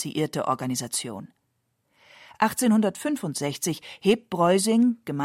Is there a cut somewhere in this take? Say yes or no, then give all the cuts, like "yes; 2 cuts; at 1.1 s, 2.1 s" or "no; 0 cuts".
no; 0 cuts